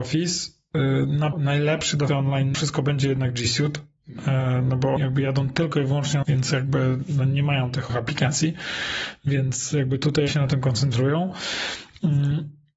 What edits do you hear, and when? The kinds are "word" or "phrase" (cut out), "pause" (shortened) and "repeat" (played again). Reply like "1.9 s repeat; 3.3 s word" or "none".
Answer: 1.3 s word; 2.1 s word; 2.5 s word; 5.0 s word; 6.2 s word; 7.9 s word; 10.3 s word